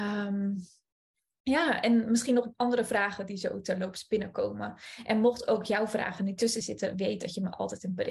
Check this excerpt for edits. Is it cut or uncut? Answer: uncut